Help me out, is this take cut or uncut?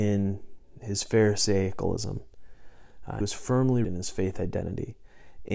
cut